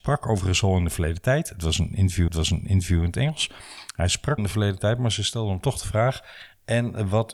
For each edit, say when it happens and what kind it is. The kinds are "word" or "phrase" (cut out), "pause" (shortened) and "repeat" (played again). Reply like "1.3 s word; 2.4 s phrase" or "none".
2.3 s repeat; 4.4 s word